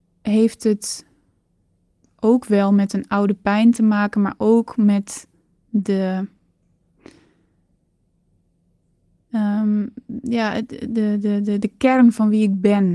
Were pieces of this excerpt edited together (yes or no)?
no